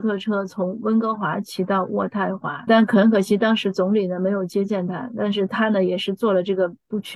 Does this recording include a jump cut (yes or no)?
yes